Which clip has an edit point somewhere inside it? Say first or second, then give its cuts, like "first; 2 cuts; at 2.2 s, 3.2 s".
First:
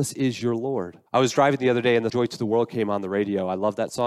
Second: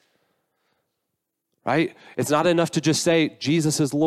first; 2 cuts; at 1.1 s, 2.1 s